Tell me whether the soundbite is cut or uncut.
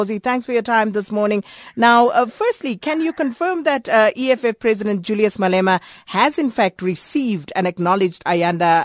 uncut